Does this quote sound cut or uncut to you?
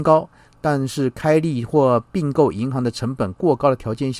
cut